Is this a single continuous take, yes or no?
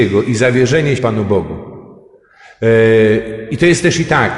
no